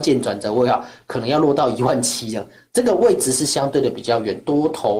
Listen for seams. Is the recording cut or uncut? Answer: uncut